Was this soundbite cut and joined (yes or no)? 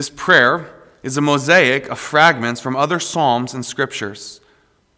no